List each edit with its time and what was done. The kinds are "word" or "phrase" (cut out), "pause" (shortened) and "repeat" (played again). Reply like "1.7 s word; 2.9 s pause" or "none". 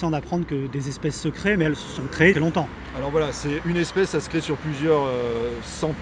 2.3 s phrase

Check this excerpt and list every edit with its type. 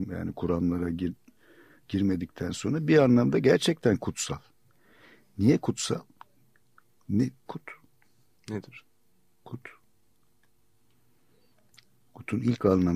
7.5 s word

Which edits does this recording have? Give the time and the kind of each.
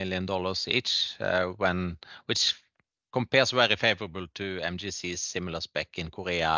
none

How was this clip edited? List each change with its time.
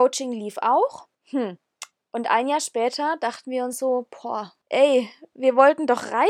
1.1 s pause; 4.6 s pause

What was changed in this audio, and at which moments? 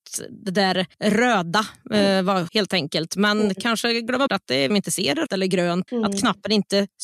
0.9 s pause; 2.5 s word; 4.3 s word; 4.7 s phrase; 5.3 s word; 5.9 s word

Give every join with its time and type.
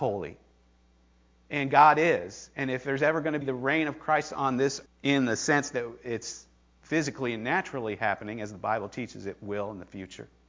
3.4 s word; 4.9 s word

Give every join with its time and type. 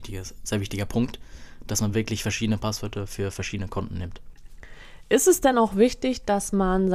none

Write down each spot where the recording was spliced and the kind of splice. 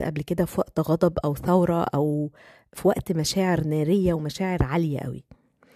none

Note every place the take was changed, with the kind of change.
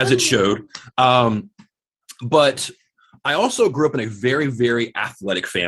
none

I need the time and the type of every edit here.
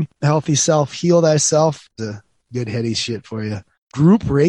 2.0 s phrase

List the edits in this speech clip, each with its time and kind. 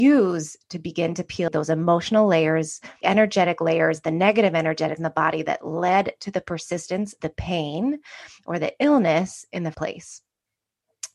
1.5 s word; 3.0 s word; 5.0 s word; 7.2 s word; 9.7 s word

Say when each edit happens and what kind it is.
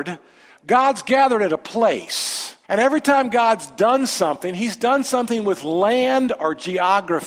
2.6 s pause

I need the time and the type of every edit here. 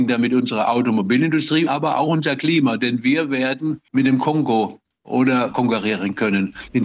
1.7 s phrase; 5.5 s word

